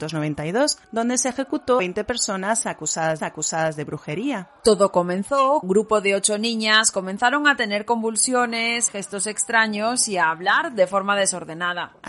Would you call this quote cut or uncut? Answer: cut